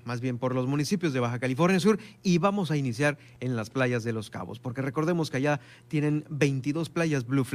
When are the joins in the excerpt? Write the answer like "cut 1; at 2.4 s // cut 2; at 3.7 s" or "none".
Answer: none